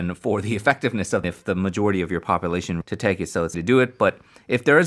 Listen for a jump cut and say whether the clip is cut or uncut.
cut